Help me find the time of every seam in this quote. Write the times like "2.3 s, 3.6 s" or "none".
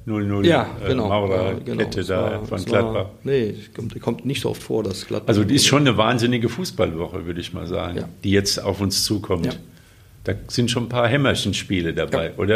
none